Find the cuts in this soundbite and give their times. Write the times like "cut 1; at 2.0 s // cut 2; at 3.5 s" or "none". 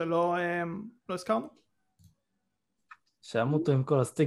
cut 1; at 1.0 s